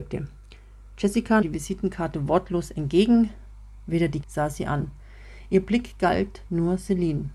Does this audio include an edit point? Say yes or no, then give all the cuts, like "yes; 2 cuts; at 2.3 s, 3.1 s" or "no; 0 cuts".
yes; 2 cuts; at 1.4 s, 4.2 s